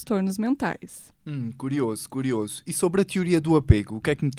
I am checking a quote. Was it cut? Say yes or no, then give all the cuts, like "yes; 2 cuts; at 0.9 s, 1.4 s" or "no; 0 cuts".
no; 0 cuts